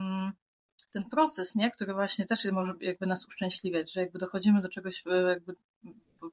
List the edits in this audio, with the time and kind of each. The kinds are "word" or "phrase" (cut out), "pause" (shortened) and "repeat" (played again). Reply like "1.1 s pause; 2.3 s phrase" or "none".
none